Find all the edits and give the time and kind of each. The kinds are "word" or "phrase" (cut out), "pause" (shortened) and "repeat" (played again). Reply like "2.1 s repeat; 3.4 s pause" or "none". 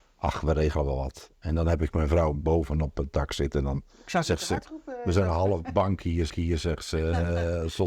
6.3 s repeat